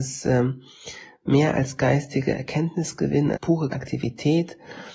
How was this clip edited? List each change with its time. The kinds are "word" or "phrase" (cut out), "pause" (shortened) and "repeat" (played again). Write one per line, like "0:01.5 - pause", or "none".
0:03.3 - word
0:03.7 - word

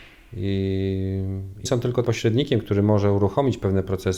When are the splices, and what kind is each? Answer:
0:01.7 - word
0:02.0 - word

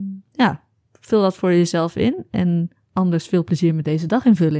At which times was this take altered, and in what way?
none

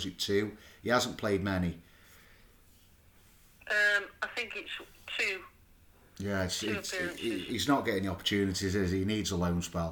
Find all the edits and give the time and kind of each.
none

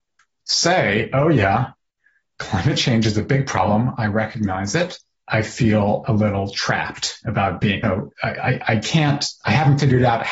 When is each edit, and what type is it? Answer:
0:05.2 - word
0:07.8 - word

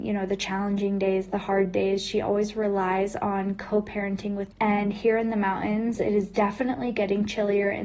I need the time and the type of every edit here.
0:04.5 - word

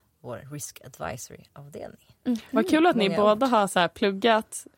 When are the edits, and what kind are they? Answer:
none

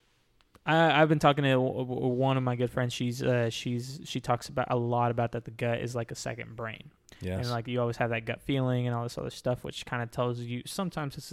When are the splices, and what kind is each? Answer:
none

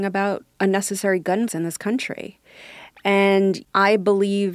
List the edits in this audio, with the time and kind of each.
0:01.5 - word

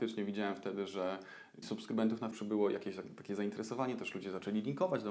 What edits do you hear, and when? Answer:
0:01.6 - word
0:02.3 - word

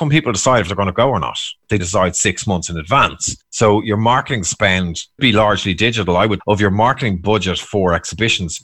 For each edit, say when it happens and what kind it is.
0:01.8 - phrase
0:05.2 - word
0:06.4 - word

